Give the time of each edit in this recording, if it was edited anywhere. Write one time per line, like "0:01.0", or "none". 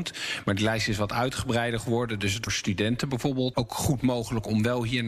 0:02.5
0:03.5

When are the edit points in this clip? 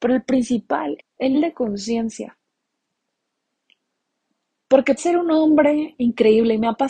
0:01.0
0:01.3
0:05.0

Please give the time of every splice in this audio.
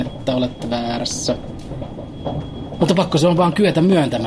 none

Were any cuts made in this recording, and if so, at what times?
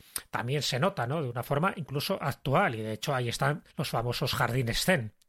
0:03.7

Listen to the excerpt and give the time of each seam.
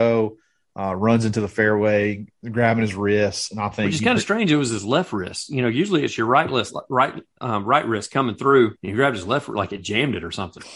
0:08.8

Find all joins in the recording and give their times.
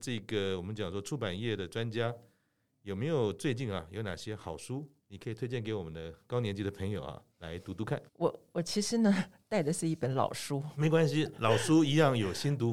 0:05.0
0:07.3
0:08.1

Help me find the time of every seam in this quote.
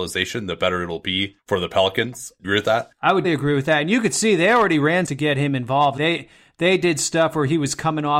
0:02.4
0:03.2
0:05.1
0:06.0

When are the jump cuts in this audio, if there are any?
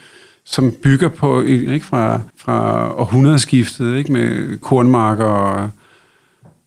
0:01.7
0:02.3
0:04.6

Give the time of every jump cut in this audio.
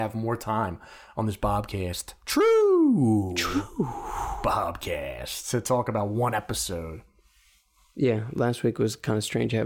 none

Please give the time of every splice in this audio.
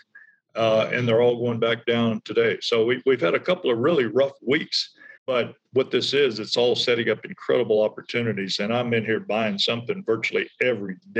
0:05.2

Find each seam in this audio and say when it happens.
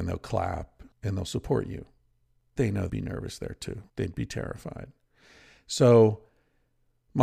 0:00.9
0:02.6
0:02.9
0:03.9

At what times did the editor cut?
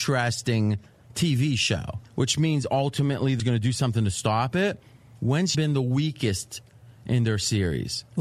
0:03.4
0:05.5

